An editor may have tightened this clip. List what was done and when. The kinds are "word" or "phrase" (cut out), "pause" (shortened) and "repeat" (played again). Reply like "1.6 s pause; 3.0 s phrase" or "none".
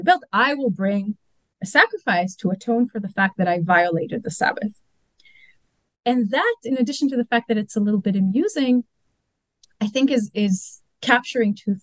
none